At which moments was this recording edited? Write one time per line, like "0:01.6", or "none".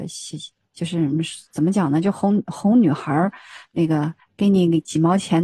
0:04.2